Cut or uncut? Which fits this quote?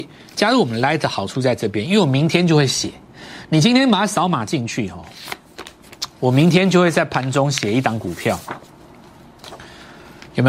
cut